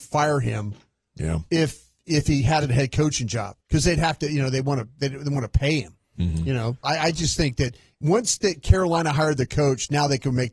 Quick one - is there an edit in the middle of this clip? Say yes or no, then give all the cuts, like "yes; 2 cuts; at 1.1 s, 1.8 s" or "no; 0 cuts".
yes; 3 cuts; at 2.6 s, 3.6 s, 6.8 s